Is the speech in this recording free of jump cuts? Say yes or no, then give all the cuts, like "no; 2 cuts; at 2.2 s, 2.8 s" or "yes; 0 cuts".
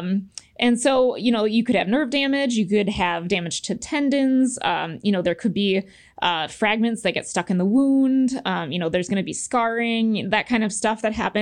yes; 0 cuts